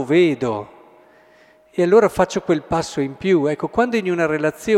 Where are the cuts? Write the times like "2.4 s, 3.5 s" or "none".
none